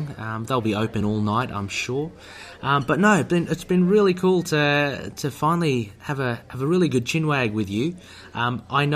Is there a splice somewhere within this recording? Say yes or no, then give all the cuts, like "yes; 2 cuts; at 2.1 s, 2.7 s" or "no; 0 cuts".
no; 0 cuts